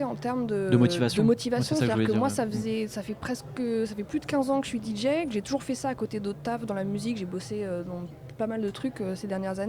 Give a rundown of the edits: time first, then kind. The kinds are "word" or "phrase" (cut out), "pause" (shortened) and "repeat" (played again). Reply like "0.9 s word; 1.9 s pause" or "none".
none